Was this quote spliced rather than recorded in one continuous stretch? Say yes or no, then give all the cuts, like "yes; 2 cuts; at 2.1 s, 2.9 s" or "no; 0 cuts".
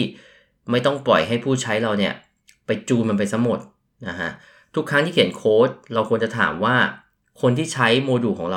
no; 0 cuts